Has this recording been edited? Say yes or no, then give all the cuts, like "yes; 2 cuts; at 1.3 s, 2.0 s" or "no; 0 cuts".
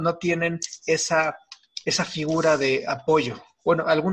no; 0 cuts